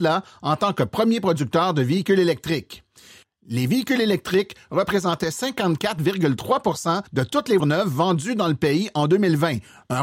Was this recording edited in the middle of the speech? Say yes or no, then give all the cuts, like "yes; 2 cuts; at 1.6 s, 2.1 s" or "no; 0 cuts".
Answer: yes; 2 cuts; at 7.1 s, 7.6 s